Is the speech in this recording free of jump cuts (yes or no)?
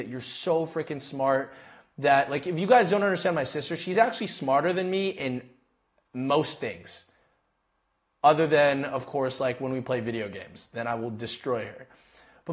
yes